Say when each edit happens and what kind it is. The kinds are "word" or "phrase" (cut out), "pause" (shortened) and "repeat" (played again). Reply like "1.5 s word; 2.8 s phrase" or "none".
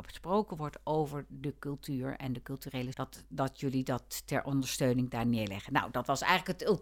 2.9 s word